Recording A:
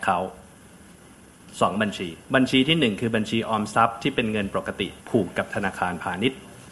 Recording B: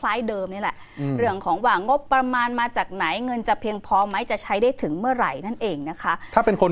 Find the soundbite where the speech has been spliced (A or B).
A